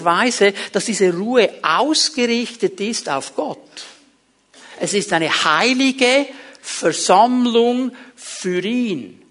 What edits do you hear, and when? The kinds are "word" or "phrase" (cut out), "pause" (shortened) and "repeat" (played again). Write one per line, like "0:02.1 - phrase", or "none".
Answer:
none